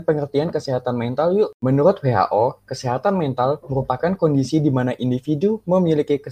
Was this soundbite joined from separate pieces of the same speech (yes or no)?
no